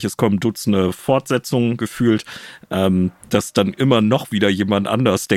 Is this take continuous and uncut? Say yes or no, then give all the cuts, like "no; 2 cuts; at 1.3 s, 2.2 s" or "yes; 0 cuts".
yes; 0 cuts